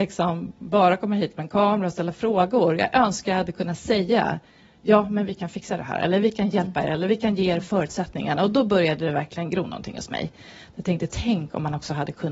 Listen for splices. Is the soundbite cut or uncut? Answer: uncut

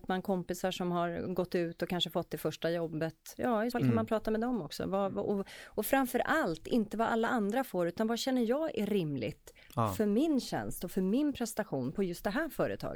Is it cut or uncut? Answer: cut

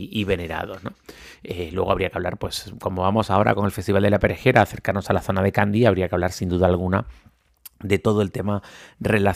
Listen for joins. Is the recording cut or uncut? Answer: uncut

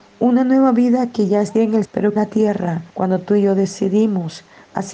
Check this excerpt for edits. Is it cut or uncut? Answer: cut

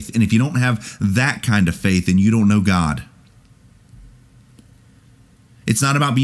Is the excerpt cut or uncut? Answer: uncut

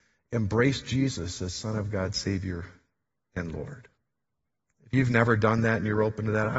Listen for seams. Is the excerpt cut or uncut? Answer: uncut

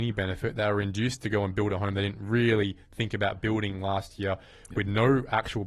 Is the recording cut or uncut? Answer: uncut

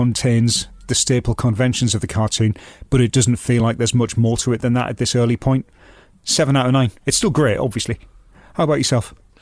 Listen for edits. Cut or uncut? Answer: uncut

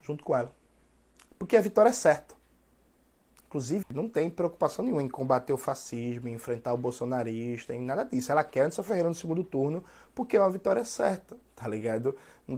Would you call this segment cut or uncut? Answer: cut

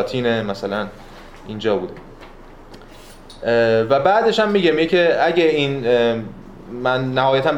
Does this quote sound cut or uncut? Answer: uncut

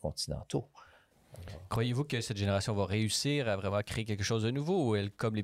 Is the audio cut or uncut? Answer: uncut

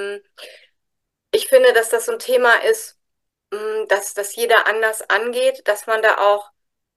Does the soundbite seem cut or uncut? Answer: uncut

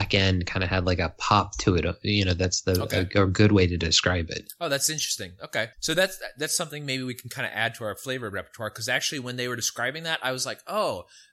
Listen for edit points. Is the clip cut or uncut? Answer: cut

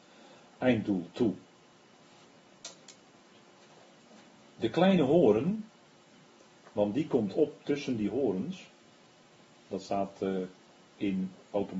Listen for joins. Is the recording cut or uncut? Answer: uncut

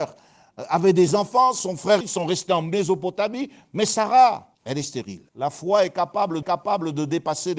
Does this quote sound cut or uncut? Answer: cut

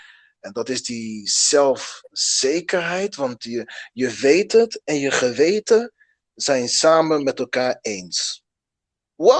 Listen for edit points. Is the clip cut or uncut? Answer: uncut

